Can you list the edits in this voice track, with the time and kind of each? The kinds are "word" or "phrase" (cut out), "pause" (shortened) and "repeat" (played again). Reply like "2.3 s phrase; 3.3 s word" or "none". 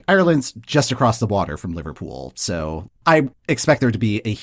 none